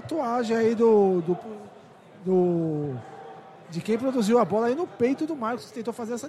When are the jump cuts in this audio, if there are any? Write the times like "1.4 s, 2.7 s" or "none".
none